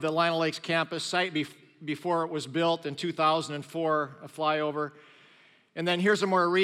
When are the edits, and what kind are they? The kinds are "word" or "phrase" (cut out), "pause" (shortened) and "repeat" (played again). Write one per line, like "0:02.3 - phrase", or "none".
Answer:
none